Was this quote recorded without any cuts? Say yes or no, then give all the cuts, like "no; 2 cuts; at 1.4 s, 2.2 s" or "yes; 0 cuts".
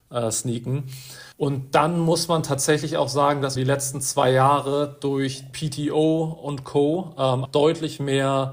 no; 4 cuts; at 1.3 s, 3.6 s, 5.5 s, 7.5 s